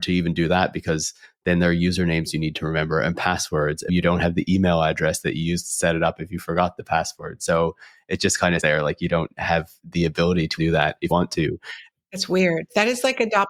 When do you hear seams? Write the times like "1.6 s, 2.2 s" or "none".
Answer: 3.9 s, 8.6 s, 10.6 s, 11.1 s